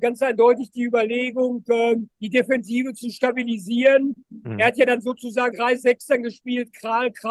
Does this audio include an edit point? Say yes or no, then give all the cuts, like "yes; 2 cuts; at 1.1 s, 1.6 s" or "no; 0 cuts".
yes; 2 cuts; at 2.1 s, 5.5 s